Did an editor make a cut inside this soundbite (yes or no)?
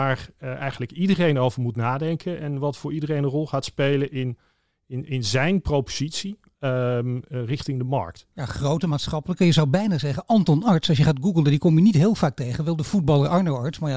no